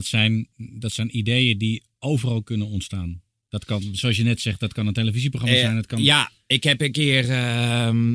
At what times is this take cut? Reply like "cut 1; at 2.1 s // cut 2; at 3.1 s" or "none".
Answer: none